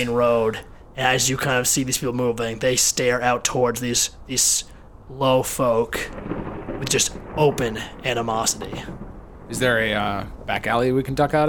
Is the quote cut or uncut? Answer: uncut